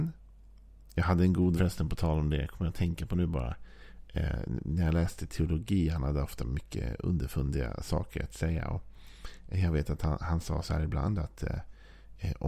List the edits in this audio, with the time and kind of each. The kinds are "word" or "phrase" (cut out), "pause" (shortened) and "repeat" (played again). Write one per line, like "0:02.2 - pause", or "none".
0:01.6 - word